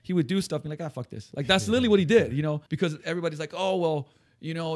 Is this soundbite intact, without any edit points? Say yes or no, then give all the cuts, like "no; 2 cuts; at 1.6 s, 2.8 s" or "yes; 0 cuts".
no; 1 cut; at 2.7 s